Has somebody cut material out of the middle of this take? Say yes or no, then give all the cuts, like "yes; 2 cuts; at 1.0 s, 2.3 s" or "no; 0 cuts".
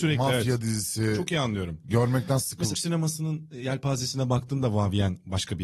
yes; 1 cut; at 2.7 s